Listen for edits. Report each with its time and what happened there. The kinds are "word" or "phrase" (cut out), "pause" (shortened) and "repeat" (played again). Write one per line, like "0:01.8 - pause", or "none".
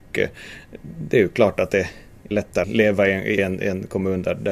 0:02.3 - word
0:02.6 - word
0:03.4 - phrase